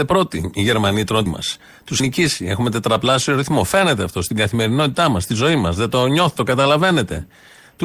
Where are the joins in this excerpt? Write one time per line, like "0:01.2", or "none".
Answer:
0:01.3
0:02.0
0:06.4